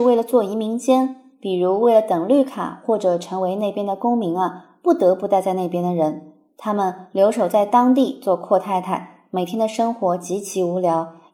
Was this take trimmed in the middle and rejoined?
no; 0 cuts

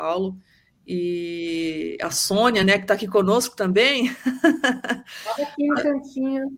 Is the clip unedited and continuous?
yes; 0 cuts

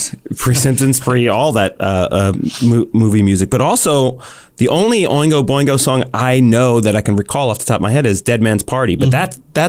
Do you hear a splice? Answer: no; 0 cuts

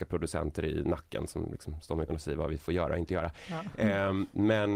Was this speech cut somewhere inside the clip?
yes; 1 cut; at 2.1 s

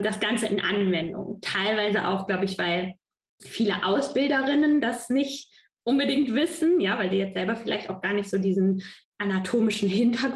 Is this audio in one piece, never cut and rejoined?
yes; 0 cuts

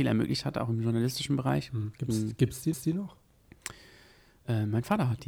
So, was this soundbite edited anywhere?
yes; 1 cut; at 2.7 s

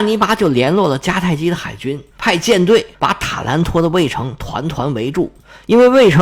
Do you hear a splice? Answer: yes; 1 cut; at 2.9 s

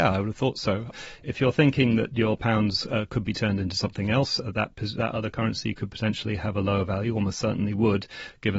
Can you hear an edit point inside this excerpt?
no; 0 cuts

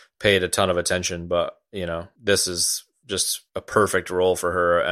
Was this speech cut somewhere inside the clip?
no; 0 cuts

